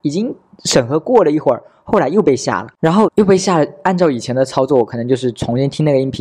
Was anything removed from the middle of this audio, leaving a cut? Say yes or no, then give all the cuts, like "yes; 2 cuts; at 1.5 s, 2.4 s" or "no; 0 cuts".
yes; 2 cuts; at 2.7 s, 3.1 s